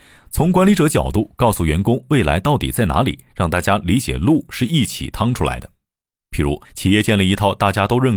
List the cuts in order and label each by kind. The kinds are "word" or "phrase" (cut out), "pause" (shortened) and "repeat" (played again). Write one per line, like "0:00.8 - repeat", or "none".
0:06.6 - pause